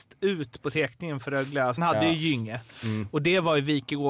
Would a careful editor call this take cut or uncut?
cut